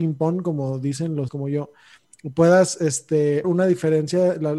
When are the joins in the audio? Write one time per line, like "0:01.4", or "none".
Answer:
0:01.3
0:03.4